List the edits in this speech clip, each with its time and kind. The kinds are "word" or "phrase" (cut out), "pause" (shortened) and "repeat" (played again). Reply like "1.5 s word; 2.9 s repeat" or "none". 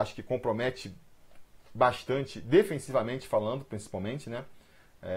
none